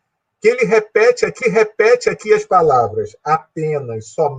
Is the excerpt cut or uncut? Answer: cut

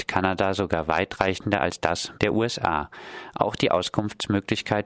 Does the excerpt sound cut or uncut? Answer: cut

